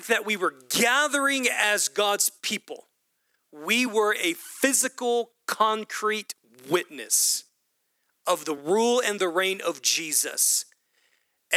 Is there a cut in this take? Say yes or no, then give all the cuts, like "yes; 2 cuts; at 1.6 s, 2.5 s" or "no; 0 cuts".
no; 0 cuts